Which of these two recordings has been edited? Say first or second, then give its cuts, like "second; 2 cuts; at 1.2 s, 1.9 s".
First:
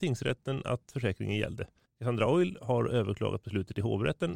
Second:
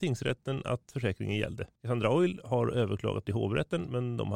second; 2 cuts; at 1.8 s, 3.2 s